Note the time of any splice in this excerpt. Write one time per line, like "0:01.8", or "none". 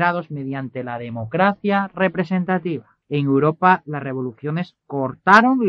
0:03.0